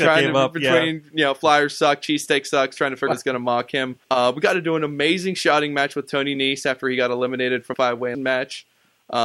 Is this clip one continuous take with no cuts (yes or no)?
no